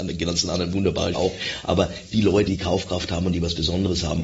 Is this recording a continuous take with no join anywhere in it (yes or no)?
no